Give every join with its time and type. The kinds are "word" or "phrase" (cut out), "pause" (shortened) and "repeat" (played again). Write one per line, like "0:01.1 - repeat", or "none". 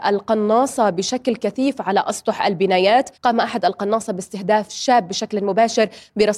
0:03.1 - pause